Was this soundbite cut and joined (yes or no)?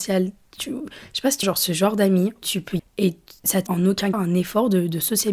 yes